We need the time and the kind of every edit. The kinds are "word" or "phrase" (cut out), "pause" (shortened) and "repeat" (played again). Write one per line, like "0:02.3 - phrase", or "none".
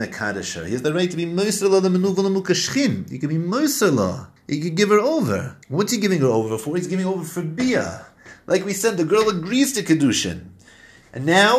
0:04.4 - pause
0:05.6 - pause